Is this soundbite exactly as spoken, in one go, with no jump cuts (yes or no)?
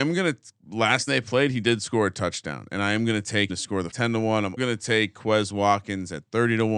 no